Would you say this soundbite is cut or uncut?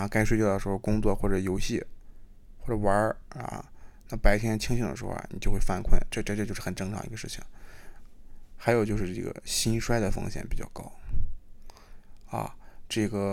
uncut